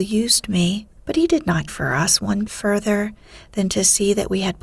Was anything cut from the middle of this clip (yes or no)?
yes